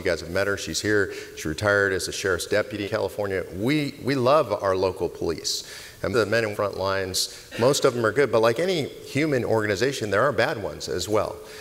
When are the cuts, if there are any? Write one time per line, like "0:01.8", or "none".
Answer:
0:02.8
0:06.1
0:06.5